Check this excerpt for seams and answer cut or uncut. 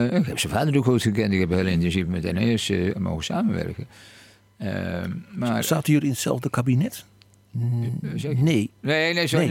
uncut